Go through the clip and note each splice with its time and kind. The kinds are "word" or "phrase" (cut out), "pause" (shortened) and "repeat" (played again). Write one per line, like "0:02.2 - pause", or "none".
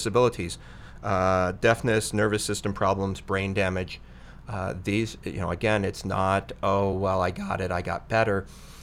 none